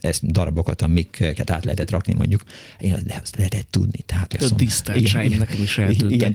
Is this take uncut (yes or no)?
yes